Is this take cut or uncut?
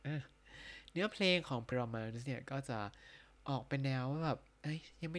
cut